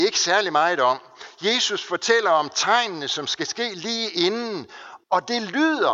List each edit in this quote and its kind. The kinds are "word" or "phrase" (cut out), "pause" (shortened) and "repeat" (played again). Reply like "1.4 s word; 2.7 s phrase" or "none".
5.0 s pause